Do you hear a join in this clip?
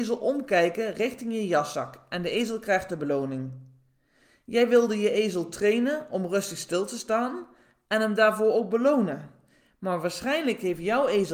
no; 0 cuts

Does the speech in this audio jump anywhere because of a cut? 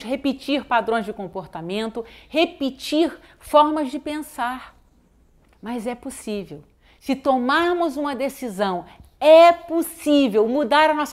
no; 0 cuts

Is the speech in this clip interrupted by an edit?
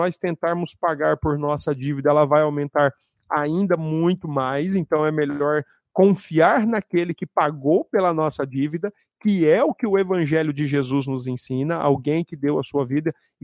no; 0 cuts

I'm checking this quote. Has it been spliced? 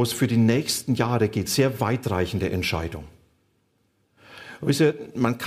no; 0 cuts

